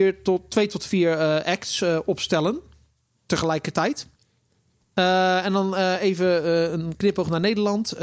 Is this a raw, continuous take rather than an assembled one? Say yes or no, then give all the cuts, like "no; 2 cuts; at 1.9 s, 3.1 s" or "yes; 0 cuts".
yes; 0 cuts